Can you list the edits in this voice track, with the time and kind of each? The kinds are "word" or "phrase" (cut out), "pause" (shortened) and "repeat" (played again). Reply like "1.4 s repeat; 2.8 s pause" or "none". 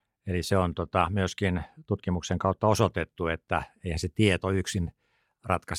none